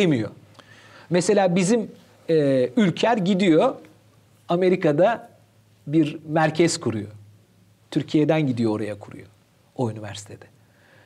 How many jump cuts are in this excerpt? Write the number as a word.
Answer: zero